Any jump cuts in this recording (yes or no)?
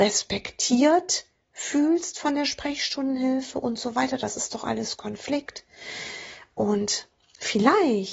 no